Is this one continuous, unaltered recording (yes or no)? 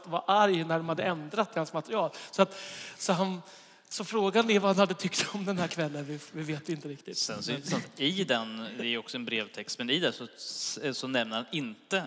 yes